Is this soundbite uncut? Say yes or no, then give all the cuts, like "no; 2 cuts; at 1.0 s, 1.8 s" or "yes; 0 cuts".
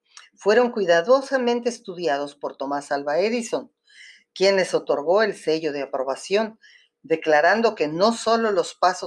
yes; 0 cuts